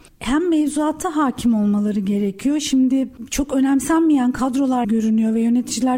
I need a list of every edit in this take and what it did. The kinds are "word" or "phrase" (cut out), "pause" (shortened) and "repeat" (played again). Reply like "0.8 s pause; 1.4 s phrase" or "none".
4.8 s word